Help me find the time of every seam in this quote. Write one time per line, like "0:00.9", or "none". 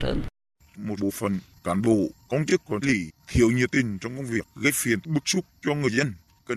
0:01.0
0:02.8
0:05.0